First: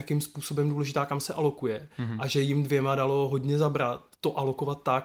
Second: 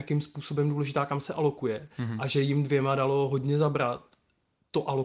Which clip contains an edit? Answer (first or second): first